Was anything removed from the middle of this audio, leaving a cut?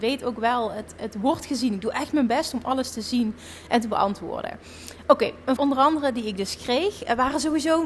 yes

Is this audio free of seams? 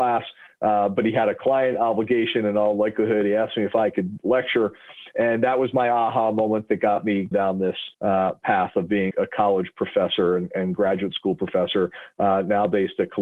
no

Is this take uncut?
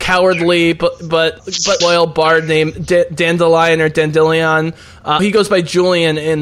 no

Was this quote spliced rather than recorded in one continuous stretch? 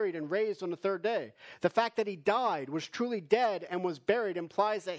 no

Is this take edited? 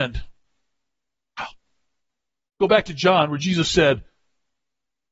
no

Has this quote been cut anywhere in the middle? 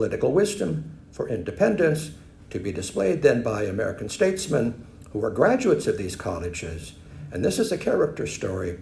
no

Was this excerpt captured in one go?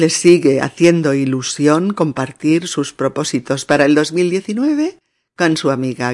yes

